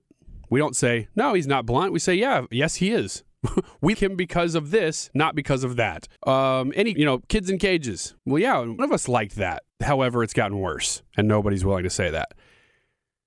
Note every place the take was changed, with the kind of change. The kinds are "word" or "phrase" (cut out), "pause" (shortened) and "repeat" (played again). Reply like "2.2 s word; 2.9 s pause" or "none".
3.9 s word; 6.2 s pause; 7.0 s word; 8.2 s pause; 8.8 s word; 9.7 s pause